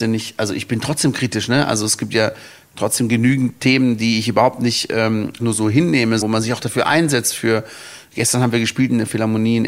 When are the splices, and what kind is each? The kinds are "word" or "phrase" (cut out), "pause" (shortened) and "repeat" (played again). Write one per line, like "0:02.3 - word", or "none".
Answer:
0:05.4 - word
0:06.2 - word